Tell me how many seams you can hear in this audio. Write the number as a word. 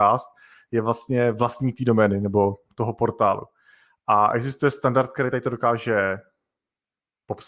zero